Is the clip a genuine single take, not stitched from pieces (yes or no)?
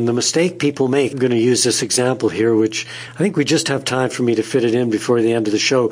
no